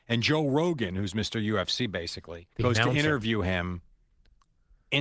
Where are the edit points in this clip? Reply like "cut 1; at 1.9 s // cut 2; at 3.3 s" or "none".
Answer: cut 1; at 2.5 s